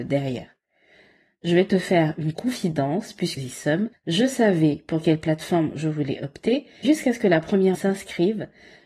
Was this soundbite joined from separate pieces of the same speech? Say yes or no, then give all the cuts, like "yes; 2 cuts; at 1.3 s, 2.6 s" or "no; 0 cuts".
yes; 4 cuts; at 3.4 s, 3.9 s, 6.8 s, 7.7 s